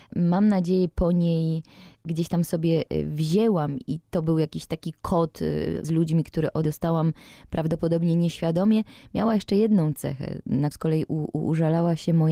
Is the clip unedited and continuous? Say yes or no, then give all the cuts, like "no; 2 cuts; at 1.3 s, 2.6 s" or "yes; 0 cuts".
no; 4 cuts; at 3.9 s, 5.8 s, 6.6 s, 10.7 s